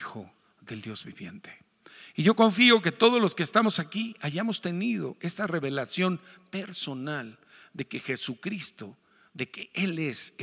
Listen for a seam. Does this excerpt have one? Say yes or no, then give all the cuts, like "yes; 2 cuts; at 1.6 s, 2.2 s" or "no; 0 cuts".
no; 0 cuts